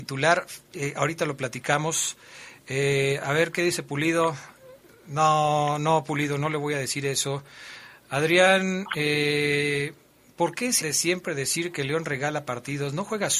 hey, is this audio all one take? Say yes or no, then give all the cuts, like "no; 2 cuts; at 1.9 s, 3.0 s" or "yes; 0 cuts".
no; 1 cut; at 10.8 s